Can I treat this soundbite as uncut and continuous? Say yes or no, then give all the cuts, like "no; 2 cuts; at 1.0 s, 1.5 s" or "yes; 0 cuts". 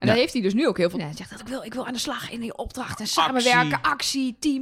no; 2 cuts; at 0.9 s, 1.4 s